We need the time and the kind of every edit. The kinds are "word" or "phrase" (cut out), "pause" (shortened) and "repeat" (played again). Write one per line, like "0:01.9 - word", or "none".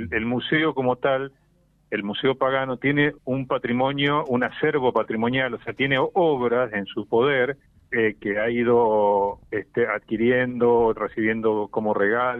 0:03.2 - pause
0:07.7 - pause